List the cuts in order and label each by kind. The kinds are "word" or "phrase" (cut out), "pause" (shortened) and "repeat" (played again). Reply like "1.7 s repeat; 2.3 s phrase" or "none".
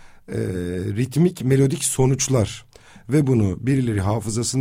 none